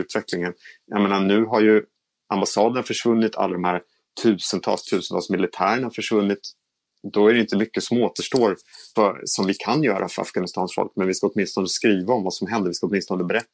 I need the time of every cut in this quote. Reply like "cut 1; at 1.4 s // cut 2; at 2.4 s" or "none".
cut 1; at 9.0 s